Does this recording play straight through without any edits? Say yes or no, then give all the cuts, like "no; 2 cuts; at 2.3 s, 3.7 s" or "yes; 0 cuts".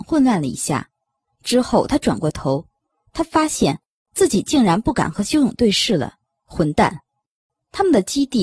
yes; 0 cuts